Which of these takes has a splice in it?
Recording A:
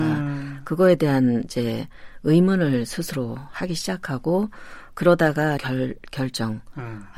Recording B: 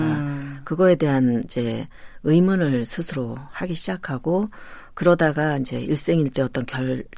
A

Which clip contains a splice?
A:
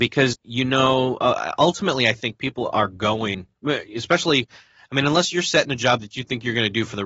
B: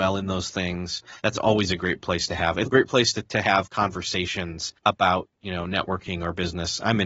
B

